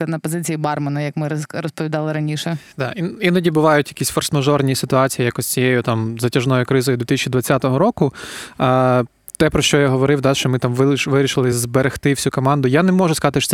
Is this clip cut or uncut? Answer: uncut